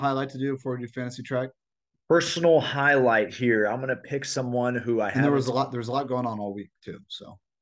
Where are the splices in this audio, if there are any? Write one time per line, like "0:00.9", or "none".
0:01.7